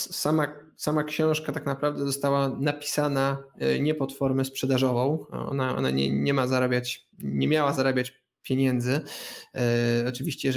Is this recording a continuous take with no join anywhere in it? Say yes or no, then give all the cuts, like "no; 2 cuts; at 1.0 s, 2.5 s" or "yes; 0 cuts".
no; 1 cut; at 7.1 s